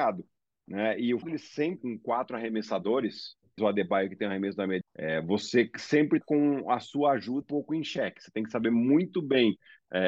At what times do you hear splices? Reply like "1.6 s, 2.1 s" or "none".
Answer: 1.2 s, 1.8 s, 3.6 s, 4.8 s, 6.2 s, 7.4 s